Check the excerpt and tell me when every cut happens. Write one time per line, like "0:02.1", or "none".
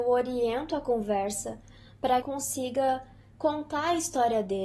0:02.2